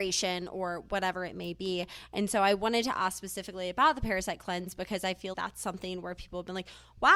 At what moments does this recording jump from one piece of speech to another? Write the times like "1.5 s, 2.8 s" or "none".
5.3 s